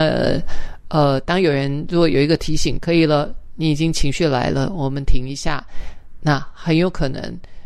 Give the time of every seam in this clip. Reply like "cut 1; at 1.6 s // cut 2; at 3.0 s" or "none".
cut 1; at 2.8 s